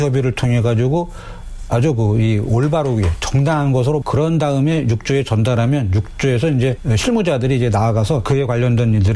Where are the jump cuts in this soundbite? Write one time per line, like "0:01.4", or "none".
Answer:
0:04.0